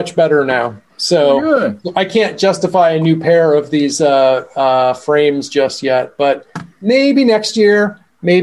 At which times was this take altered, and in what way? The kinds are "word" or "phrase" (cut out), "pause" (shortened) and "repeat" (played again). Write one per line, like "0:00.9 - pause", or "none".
none